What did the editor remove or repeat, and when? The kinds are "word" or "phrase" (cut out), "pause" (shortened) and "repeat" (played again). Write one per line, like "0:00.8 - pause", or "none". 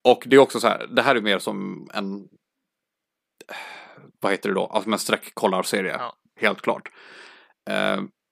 none